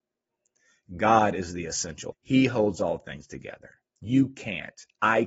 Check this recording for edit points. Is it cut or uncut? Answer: cut